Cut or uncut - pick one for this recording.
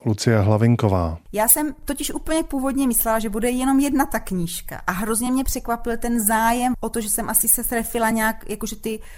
uncut